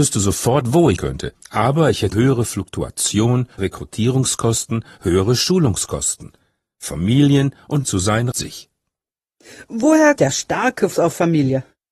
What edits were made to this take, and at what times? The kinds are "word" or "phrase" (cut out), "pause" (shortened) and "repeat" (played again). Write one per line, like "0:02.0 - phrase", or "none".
0:01.0 - word
0:02.1 - word
0:03.6 - word
0:07.8 - word
0:08.3 - word
0:10.2 - word
0:10.9 - word